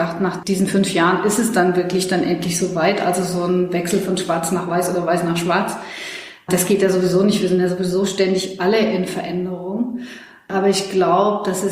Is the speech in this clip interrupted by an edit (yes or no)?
no